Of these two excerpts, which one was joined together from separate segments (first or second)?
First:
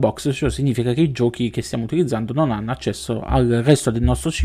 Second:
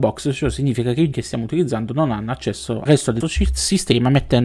second